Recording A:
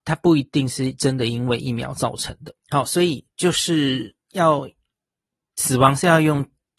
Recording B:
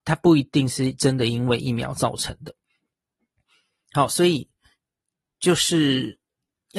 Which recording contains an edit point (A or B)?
A